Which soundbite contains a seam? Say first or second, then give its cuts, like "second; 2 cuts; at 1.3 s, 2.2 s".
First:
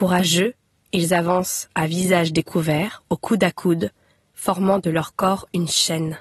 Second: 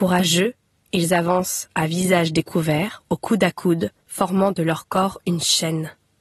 second; 1 cut; at 4.0 s